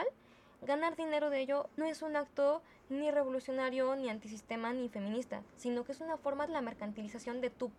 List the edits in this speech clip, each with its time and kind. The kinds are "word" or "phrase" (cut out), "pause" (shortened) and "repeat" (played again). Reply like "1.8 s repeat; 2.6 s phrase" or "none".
1.8 s word; 6.5 s phrase

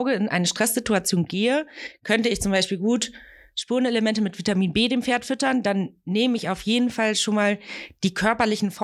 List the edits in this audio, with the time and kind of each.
none

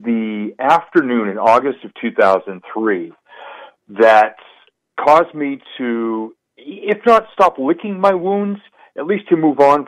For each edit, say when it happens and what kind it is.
none

